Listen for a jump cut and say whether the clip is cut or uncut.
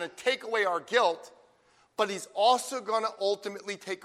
uncut